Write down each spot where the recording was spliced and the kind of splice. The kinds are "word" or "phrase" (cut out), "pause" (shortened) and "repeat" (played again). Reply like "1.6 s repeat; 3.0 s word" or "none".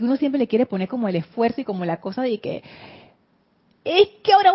none